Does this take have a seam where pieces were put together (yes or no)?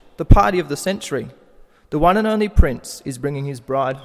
no